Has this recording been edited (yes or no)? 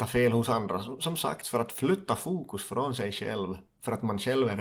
no